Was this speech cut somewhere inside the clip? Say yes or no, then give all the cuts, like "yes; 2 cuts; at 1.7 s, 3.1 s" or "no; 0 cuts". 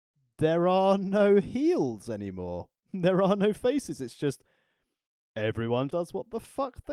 yes; 1 cut; at 5.9 s